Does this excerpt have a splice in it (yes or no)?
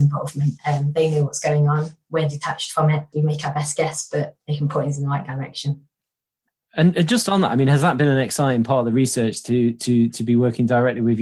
no